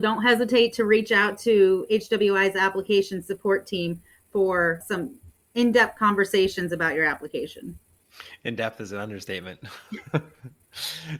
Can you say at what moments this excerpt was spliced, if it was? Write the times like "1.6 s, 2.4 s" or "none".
none